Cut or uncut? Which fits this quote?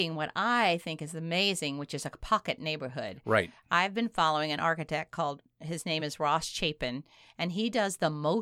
uncut